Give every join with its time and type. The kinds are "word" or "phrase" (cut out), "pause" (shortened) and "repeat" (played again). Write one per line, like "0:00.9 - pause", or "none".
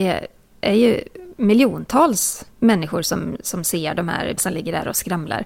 0:02.5 - pause
0:04.4 - word